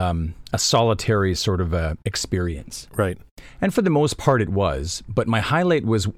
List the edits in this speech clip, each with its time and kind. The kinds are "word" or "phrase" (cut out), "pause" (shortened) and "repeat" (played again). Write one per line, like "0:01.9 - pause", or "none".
none